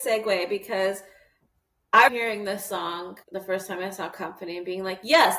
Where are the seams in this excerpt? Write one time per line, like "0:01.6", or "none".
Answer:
0:02.1
0:03.2